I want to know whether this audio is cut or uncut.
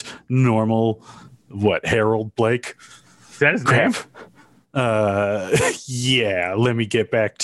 uncut